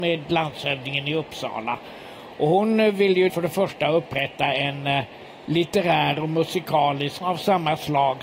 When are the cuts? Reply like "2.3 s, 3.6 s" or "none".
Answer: 3.3 s, 7.2 s